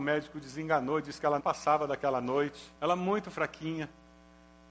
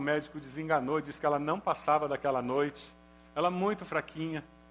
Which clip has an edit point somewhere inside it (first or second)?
first